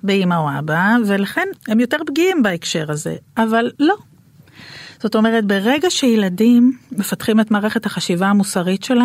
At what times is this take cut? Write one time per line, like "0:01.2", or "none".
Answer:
0:01.6
0:03.8